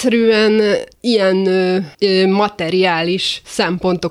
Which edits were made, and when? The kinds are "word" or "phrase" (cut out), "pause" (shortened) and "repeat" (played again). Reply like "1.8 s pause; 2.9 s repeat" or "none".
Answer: 0.9 s pause; 1.9 s pause